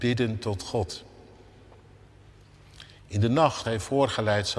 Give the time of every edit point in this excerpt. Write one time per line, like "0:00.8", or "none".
0:03.6